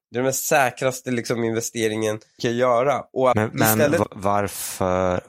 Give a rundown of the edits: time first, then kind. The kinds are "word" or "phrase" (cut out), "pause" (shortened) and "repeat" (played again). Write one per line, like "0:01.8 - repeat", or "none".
0:02.4 - word
0:03.3 - word